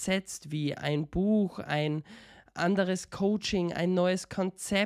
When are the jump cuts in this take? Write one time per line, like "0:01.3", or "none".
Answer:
none